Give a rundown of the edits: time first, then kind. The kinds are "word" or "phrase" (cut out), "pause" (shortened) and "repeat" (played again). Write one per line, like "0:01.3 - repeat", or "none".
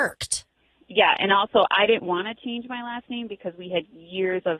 none